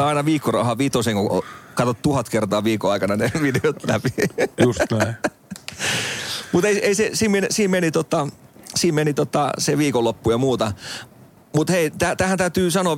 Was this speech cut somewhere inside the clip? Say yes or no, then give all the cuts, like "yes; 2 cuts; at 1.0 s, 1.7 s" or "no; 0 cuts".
no; 0 cuts